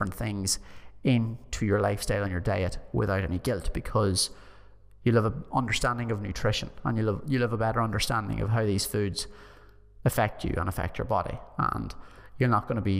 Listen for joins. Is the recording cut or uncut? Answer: uncut